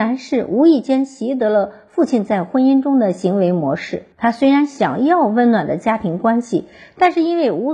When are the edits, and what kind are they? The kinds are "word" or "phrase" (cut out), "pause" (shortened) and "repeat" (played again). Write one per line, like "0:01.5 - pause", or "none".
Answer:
0:04.1 - pause

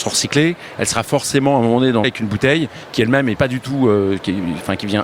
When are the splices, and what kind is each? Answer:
0:02.0 - phrase
0:03.4 - word

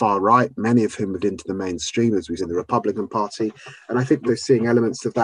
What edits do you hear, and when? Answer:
0:01.2 - word
0:02.4 - word
0:04.3 - word

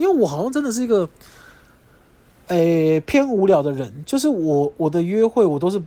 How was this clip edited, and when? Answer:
none

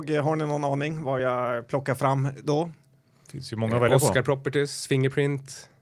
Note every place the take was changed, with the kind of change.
none

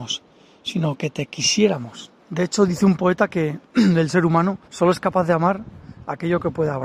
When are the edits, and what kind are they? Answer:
0:02.2 - pause
0:03.7 - pause
0:04.6 - pause

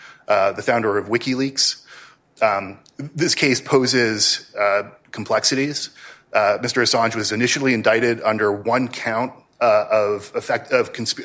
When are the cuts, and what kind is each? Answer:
none

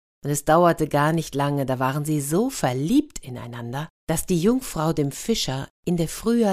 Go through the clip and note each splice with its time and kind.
0:04.0 - pause

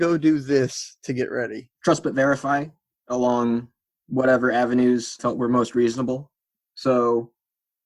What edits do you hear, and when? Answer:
0:01.7 - pause
0:05.2 - word

